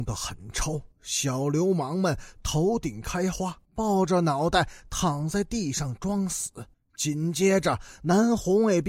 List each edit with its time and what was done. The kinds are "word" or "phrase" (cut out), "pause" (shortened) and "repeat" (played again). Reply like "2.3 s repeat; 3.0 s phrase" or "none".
0.9 s pause; 3.6 s pause; 6.7 s pause

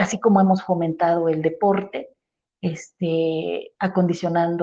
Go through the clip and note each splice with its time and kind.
none

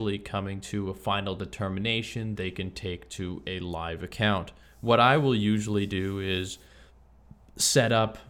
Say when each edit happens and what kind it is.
2.4 s word; 4.6 s pause

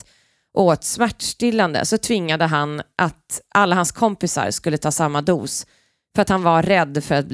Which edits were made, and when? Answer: none

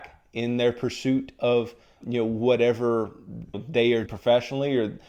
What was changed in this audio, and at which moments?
2.0 s word; 3.5 s word; 4.1 s word

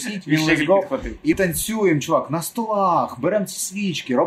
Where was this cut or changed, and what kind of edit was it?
1.3 s word

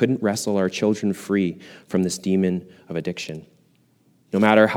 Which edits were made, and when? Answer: none

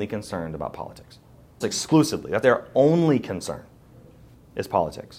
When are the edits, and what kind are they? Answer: 1.6 s word; 2.4 s word

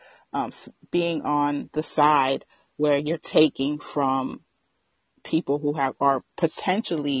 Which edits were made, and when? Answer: none

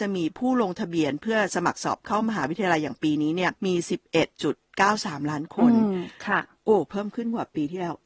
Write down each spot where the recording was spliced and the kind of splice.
3.6 s pause

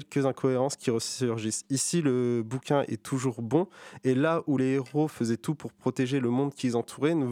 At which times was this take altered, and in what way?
none

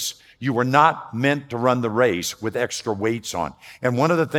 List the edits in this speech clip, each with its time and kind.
none

